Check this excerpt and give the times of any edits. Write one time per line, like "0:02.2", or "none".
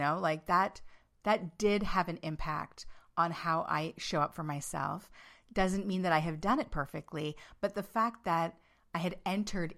none